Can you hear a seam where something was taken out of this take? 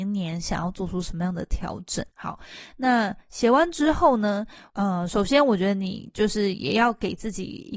yes; 1 cut; at 2.1 s

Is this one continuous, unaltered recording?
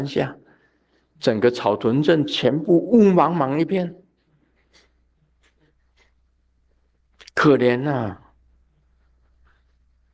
yes; 0 cuts

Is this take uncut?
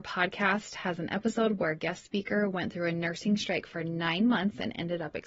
yes; 0 cuts

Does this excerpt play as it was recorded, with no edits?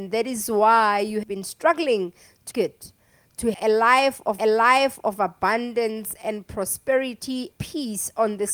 no; 5 cuts; at 1.2 s, 2.5 s, 3.5 s, 4.4 s, 7.5 s

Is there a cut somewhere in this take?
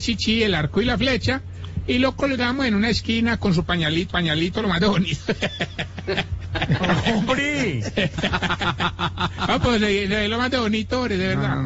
yes; 1 cut; at 4.1 s

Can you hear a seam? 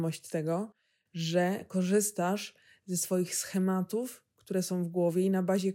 no; 0 cuts

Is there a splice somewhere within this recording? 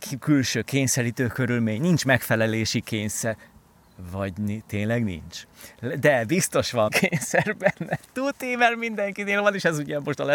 yes; 1 cut; at 6.9 s

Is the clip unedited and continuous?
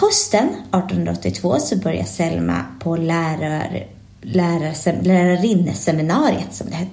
yes; 0 cuts

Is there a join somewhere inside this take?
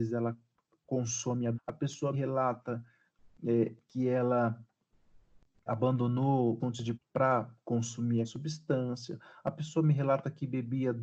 yes; 6 cuts; at 1.5 s, 2.1 s, 5.7 s, 6.6 s, 6.9 s, 8.2 s

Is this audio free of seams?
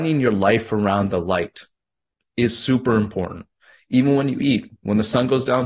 yes; 0 cuts

